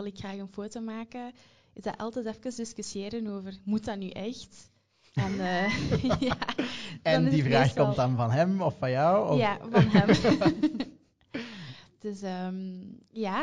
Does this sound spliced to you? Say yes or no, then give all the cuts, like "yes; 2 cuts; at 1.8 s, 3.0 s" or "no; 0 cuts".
no; 0 cuts